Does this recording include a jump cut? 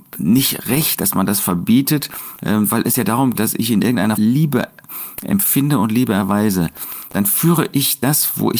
yes; 3 cuts; at 3.4 s, 4.1 s, 7.1 s

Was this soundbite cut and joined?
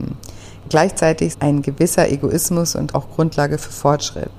yes; 2 cuts; at 1.3 s, 2.9 s

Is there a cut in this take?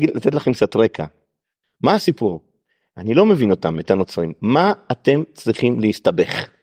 no; 0 cuts

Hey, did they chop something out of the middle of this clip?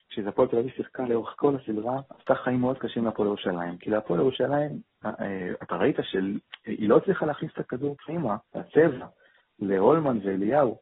yes; 2 cuts; at 2.1 s, 8.5 s

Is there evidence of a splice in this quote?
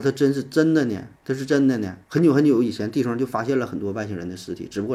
yes; 2 cuts; at 1.2 s, 2.0 s

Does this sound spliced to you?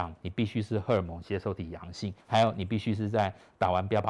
yes; 1 cut; at 2.2 s

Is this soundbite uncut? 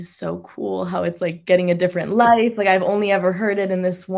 yes; 0 cuts

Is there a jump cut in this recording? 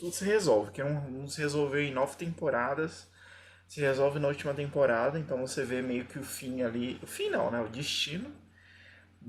no; 0 cuts

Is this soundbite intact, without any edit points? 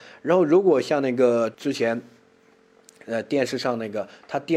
no; 1 cut; at 1.5 s

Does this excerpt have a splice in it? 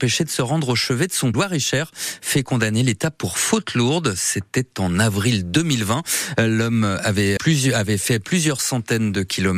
yes; 2 cuts; at 1.3 s, 7.4 s

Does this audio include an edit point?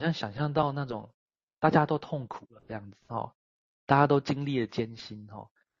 no; 0 cuts

